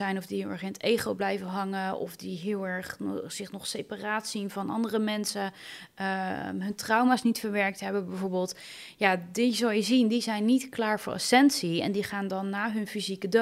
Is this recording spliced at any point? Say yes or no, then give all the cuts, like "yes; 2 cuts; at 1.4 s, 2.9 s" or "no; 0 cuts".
no; 0 cuts